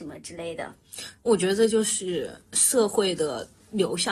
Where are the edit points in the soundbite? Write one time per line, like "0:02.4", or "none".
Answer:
0:01.2